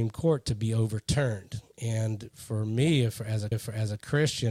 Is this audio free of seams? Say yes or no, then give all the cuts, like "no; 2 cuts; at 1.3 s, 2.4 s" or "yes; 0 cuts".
no; 2 cuts; at 2.3 s, 3.5 s